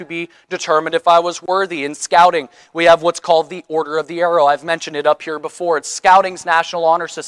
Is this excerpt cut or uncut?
uncut